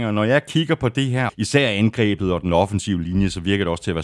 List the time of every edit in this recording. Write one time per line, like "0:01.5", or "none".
0:01.3